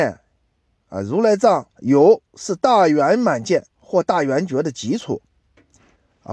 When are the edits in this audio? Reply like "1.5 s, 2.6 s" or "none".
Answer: 1.7 s, 3.7 s